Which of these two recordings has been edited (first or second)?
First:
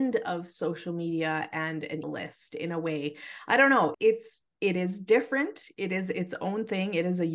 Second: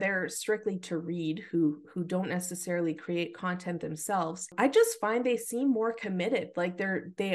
first